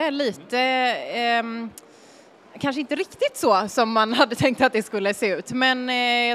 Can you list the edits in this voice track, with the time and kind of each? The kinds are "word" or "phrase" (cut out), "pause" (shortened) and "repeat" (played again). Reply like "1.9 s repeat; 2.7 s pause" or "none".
none